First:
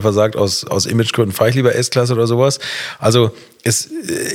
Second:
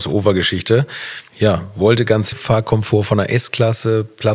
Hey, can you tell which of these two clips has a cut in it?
second; 2 cuts; at 1.3 s, 2.3 s

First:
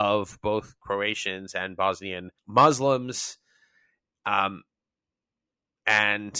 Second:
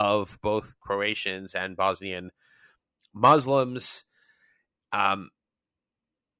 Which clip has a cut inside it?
first; 1 cut; at 2.4 s

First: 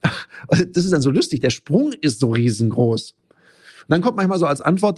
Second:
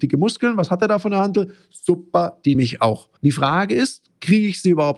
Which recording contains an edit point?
second; 2 cuts; at 2.5 s, 3.2 s

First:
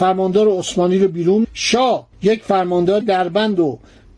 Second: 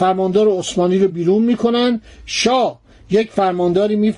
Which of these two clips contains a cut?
first; 3 cuts; at 1.4 s, 2.1 s, 3.0 s

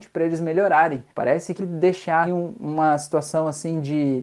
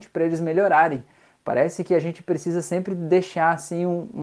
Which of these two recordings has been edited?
first; 3 cuts; at 1.1 s, 1.6 s, 2.2 s

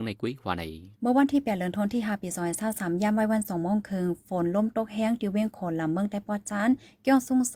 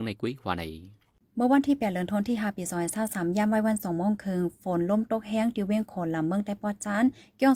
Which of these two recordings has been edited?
first; 1 cut; at 0.9 s

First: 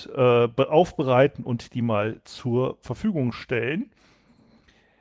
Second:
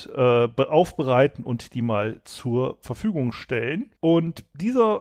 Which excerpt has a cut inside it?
second; 1 cut; at 4.0 s

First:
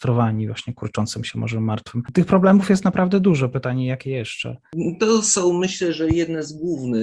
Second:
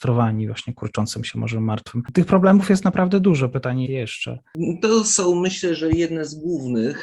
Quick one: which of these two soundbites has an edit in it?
second; 1 cut; at 3.9 s

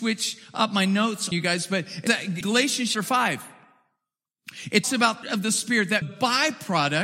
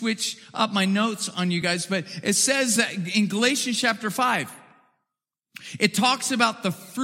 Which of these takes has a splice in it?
first; 7 cuts; at 1.3 s, 2.1 s, 2.4 s, 2.9 s, 4.8 s, 5.2 s, 6.0 s

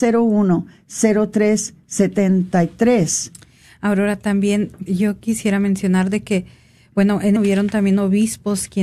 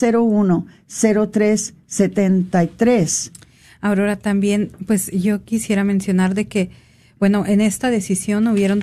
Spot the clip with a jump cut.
first; 2 cuts; at 4.9 s, 7.4 s

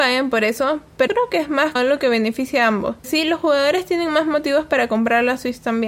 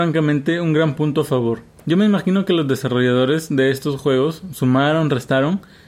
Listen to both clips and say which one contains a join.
first; 3 cuts; at 1.1 s, 1.8 s, 3.0 s

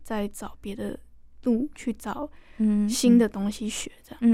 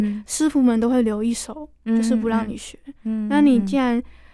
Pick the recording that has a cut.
second; 1 cut; at 3.0 s

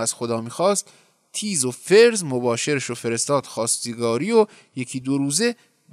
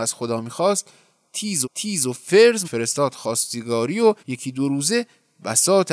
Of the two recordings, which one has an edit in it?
second; 3 cuts; at 1.6 s, 2.6 s, 4.2 s

